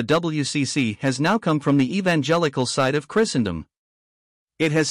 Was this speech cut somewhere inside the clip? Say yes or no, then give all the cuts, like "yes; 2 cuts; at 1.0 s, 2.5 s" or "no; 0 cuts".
no; 0 cuts